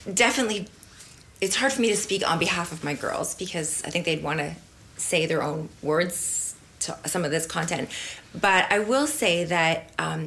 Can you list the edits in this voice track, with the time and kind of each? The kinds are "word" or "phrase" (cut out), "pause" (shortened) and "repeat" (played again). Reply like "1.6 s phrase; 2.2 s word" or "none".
none